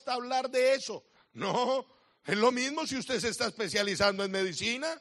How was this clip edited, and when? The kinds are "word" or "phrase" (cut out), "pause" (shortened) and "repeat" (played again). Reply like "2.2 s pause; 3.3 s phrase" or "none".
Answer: none